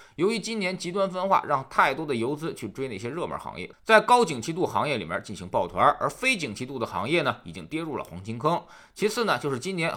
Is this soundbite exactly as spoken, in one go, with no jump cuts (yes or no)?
yes